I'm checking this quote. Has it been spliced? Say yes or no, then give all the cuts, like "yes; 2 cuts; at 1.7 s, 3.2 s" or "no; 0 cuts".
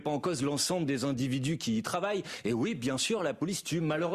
no; 0 cuts